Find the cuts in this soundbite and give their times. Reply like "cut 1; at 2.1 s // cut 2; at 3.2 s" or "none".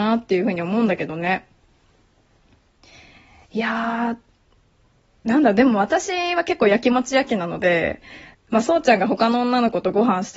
cut 1; at 8.3 s